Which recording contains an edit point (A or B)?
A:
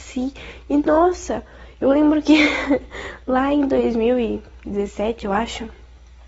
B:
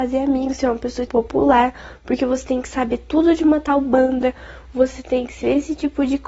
B